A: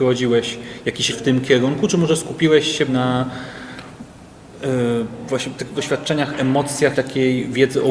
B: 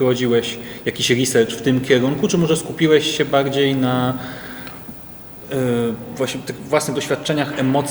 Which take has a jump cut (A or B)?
A